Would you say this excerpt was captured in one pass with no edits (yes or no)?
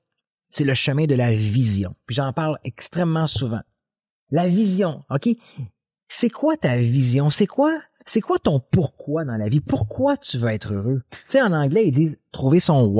yes